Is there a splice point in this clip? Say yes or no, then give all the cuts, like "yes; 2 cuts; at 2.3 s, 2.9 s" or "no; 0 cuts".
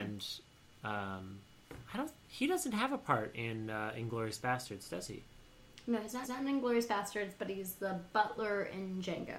yes; 1 cut; at 6.2 s